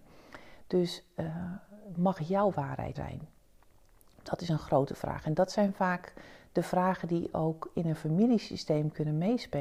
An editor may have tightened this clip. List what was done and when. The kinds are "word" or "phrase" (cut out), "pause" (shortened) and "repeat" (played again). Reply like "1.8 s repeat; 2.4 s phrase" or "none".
2.9 s word

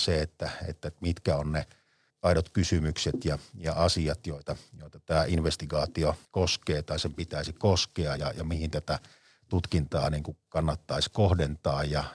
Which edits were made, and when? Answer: 2.1 s word; 6.2 s pause; 8.2 s word

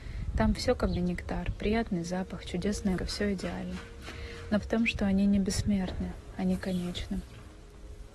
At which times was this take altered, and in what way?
1.0 s word; 3.0 s word; 4.6 s word

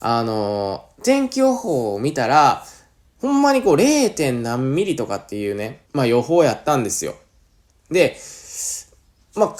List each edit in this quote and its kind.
3.0 s pause; 5.8 s pause

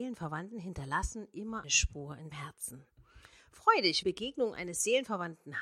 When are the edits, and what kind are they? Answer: 1.6 s word; 2.3 s word; 4.0 s phrase

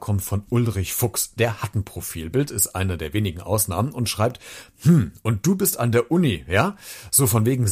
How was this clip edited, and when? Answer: none

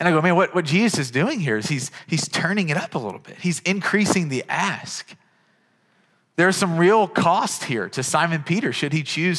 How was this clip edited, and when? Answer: none

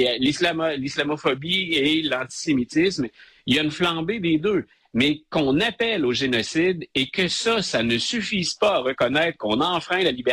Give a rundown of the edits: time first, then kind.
none

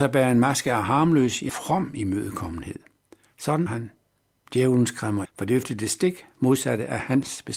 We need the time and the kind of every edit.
1.5 s word; 3.7 s word; 5.2 s word; 5.6 s word

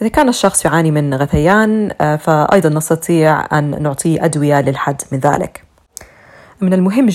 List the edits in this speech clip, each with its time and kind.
none

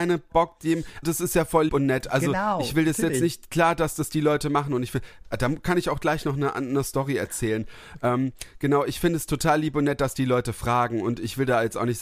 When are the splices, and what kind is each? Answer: 1.0 s word; 1.7 s word

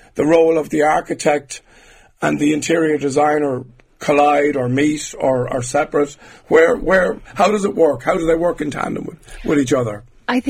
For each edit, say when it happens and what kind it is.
none

